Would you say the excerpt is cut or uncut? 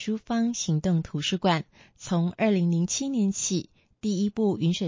uncut